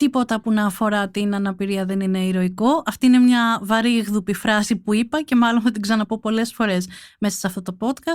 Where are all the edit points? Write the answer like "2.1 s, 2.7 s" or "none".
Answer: none